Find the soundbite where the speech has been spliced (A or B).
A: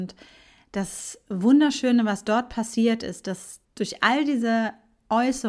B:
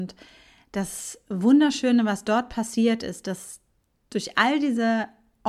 A